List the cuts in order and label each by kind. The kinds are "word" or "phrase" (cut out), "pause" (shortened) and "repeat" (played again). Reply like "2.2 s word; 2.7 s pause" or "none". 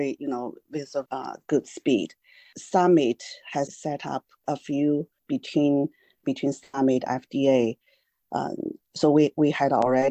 1.1 s word; 3.7 s word; 4.4 s word; 5.2 s word; 6.2 s word; 7.1 s word